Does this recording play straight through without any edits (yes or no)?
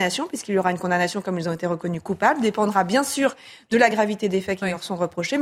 yes